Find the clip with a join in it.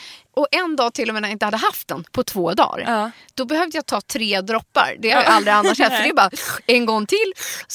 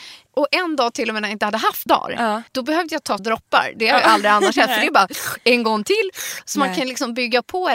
second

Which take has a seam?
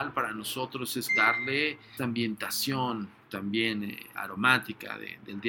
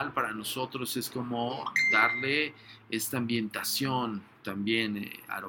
first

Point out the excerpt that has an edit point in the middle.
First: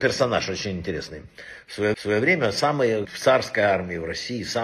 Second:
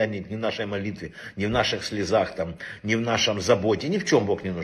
first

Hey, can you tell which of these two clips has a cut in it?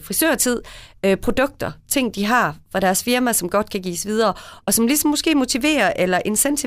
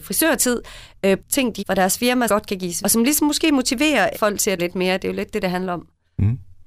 second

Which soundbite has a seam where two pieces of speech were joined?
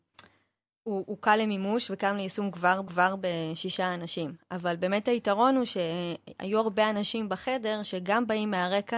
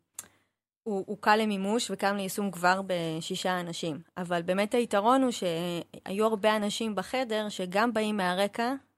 first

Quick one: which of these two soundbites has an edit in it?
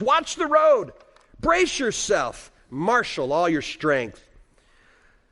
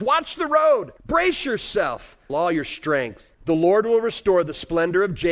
second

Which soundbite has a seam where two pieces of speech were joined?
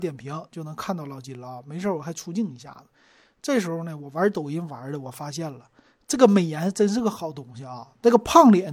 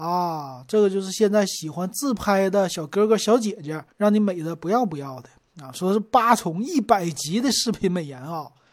second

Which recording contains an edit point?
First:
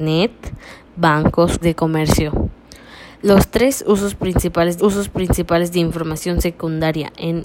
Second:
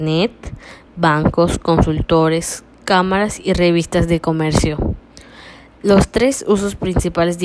first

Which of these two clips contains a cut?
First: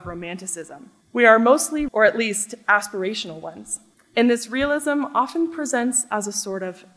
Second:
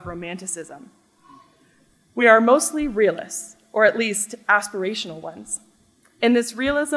first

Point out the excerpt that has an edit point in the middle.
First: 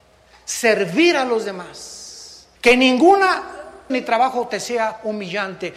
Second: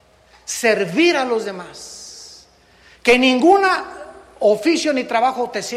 first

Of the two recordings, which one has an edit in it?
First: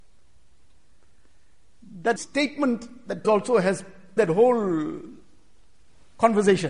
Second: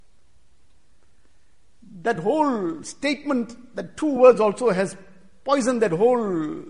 first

